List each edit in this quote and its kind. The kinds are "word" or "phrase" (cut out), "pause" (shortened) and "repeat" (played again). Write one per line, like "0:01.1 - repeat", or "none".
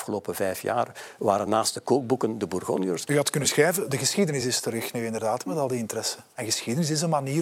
none